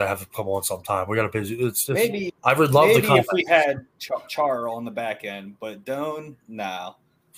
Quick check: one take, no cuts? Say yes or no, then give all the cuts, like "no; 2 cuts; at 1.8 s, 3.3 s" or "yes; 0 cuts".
no; 1 cut; at 2.4 s